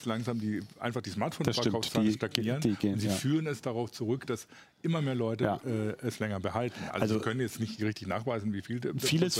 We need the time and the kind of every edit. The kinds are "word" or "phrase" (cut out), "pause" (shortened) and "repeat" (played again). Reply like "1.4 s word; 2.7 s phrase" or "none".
none